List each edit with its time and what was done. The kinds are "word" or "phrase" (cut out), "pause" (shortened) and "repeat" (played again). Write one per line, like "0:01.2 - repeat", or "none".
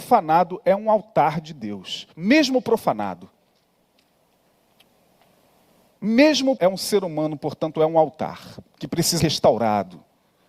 0:02.1 - pause
0:06.6 - word
0:09.2 - word